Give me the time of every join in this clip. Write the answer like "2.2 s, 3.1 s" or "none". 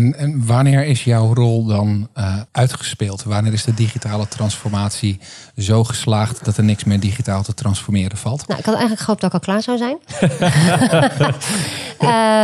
2.5 s